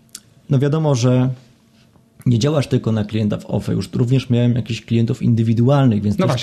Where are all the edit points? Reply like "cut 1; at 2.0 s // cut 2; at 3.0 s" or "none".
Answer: none